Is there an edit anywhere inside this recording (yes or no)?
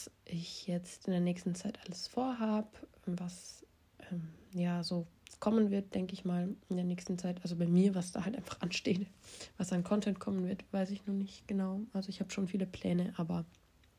no